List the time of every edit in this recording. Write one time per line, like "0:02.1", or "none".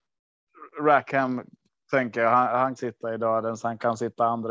0:02.8